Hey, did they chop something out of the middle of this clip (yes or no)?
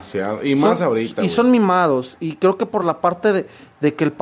no